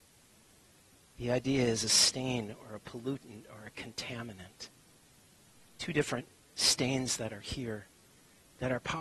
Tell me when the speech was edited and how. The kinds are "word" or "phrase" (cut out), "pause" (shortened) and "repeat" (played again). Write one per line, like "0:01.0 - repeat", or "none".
none